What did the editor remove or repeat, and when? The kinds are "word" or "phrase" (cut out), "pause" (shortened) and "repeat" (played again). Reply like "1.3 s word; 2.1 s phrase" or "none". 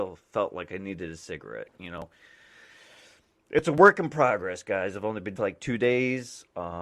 5.4 s phrase

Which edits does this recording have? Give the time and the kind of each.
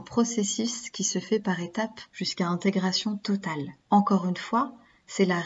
2.1 s pause; 3.8 s pause

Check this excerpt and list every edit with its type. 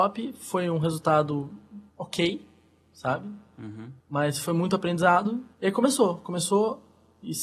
1.9 s pause; 4.0 s pause; 5.5 s pause

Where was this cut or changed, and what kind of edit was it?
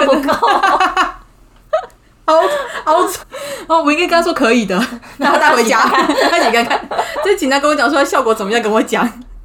3.2 s word

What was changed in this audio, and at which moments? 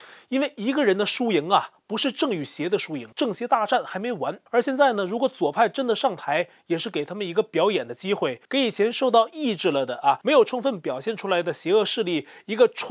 3.1 s pause; 4.5 s pause; 8.4 s pause

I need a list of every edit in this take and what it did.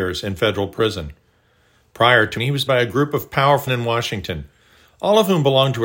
2.4 s word; 2.7 s word; 3.7 s word

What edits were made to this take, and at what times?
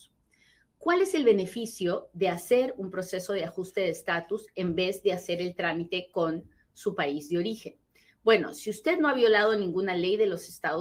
none

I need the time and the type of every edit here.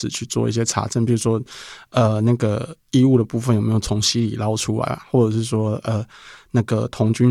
none

